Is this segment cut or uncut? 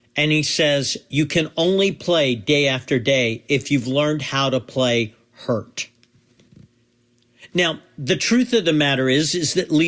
uncut